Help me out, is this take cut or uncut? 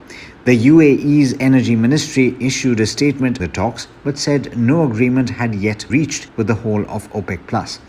cut